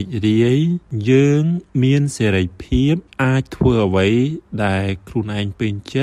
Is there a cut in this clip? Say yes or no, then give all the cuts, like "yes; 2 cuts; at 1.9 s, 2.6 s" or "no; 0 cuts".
no; 0 cuts